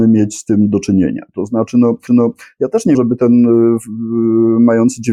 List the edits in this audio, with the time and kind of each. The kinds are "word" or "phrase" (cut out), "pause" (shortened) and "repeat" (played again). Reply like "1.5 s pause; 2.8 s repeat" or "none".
2.1 s repeat; 2.9 s word